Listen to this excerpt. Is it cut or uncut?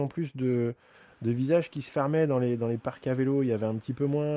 uncut